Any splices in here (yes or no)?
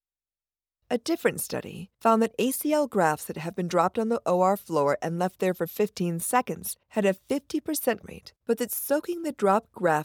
yes